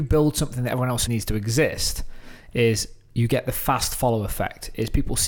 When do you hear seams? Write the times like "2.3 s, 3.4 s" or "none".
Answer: 1.1 s